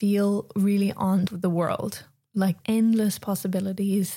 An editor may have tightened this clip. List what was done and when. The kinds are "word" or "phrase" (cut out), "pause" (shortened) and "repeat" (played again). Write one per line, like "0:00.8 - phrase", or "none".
0:01.3 - word
0:02.6 - word